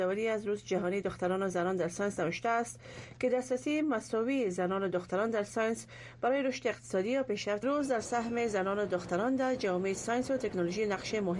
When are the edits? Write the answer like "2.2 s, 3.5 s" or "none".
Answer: 7.6 s